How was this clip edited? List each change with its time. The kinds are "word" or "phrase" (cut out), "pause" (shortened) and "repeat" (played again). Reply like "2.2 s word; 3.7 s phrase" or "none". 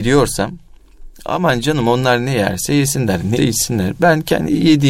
3.4 s word